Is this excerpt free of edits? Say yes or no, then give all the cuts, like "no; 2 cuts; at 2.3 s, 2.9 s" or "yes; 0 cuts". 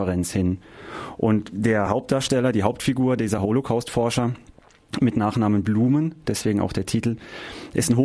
yes; 0 cuts